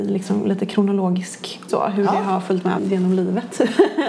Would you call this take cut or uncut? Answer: cut